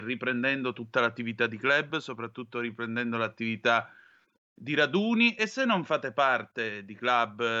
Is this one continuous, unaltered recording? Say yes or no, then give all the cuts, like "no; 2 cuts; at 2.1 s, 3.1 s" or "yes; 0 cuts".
yes; 0 cuts